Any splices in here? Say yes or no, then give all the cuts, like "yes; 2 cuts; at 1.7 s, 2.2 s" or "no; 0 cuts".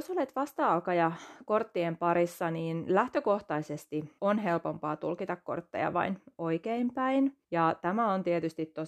yes; 2 cuts; at 4.2 s, 7.4 s